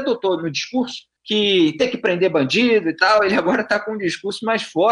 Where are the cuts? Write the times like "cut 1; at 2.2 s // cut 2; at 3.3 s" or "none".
cut 1; at 1.2 s